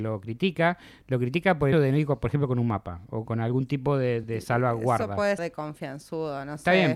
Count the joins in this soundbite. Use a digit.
4